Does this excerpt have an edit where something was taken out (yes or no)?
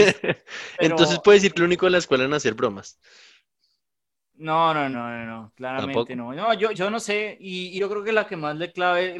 yes